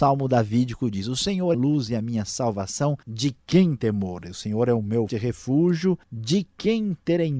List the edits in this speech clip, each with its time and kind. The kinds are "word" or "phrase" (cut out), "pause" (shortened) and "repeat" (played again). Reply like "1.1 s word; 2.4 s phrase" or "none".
1.5 s phrase; 3.0 s pause; 3.8 s word; 5.1 s word; 6.0 s pause